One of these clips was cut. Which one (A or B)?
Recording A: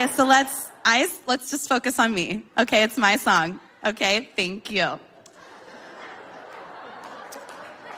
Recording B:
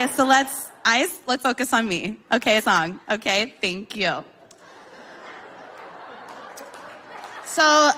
B